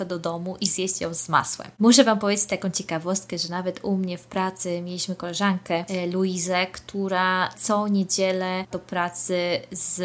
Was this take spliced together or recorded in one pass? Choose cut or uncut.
cut